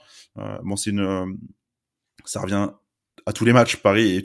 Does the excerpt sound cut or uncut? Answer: uncut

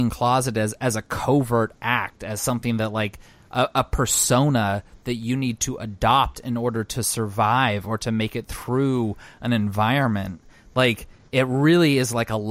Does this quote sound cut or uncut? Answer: uncut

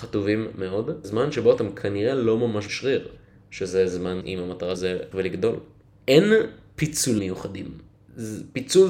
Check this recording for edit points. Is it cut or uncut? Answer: cut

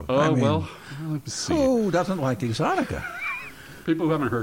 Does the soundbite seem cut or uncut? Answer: uncut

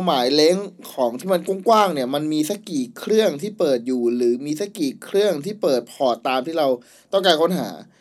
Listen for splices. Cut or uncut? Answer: uncut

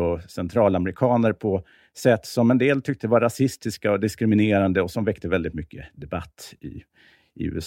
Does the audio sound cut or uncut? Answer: uncut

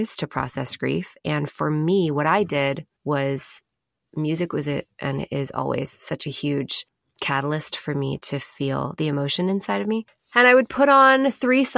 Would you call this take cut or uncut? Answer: uncut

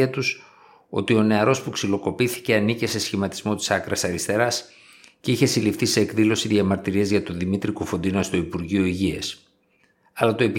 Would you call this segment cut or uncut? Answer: uncut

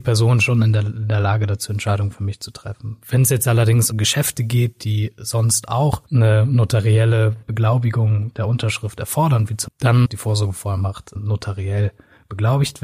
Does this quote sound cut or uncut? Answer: cut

